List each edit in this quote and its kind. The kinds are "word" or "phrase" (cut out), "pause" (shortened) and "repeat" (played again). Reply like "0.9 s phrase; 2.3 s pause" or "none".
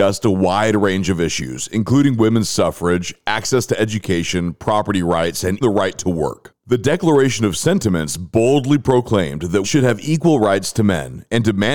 5.6 s word; 9.6 s word